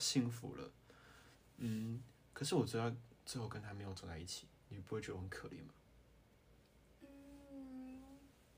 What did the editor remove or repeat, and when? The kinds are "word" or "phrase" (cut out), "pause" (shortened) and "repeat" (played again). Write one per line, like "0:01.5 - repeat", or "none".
0:04.6 - pause